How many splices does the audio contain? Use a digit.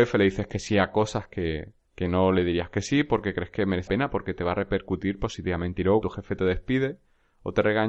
3